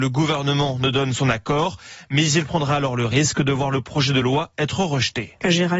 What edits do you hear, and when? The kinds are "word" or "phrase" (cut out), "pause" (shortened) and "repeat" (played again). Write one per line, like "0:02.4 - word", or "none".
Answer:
none